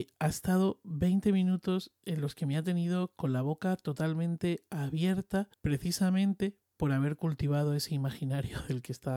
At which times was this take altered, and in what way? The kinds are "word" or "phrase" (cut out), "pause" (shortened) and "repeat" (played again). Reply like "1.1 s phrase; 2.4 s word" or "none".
5.5 s pause

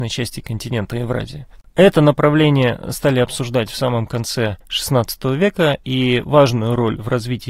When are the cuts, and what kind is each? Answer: 4.6 s pause

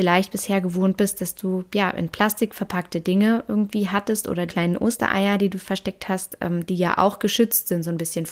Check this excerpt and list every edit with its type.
4.5 s phrase

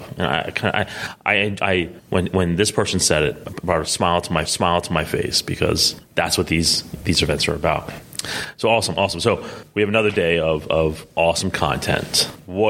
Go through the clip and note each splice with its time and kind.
4.5 s repeat

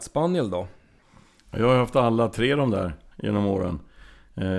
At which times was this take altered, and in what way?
none

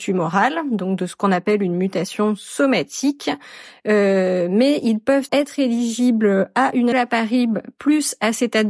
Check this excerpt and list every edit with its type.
5.3 s word; 6.9 s phrase

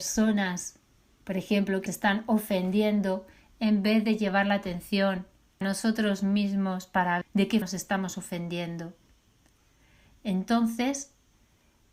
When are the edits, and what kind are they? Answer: 1.9 s word; 5.6 s word; 7.2 s word; 7.6 s word

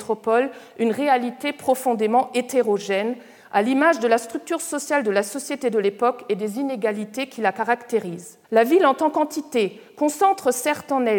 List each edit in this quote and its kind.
8.4 s pause

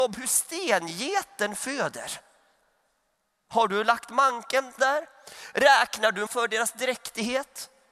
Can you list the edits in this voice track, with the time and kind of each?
4.8 s word; 6.3 s word

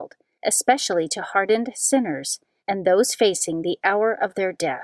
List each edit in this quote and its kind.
none

